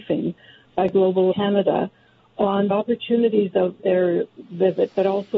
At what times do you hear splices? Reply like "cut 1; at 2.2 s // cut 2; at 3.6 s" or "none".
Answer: cut 1; at 1.3 s // cut 2; at 2.7 s // cut 3; at 3.8 s